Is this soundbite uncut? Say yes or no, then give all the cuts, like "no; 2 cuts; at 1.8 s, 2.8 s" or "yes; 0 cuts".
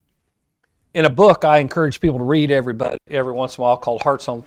yes; 0 cuts